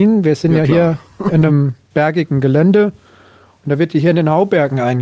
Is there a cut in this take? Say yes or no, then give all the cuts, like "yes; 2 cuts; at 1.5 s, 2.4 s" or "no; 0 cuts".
no; 0 cuts